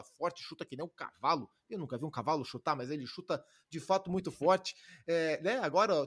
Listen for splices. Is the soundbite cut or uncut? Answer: uncut